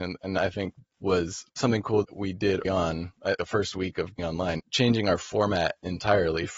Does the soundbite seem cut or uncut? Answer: cut